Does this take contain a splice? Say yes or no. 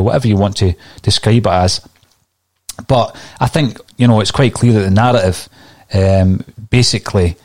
no